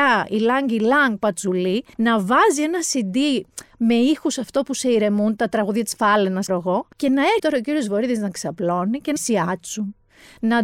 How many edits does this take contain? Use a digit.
5